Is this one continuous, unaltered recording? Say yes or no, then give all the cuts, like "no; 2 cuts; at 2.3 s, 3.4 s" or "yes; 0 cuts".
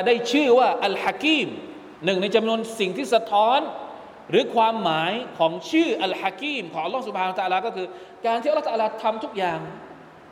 no; 1 cut; at 2.0 s